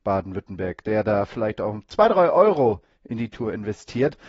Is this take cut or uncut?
uncut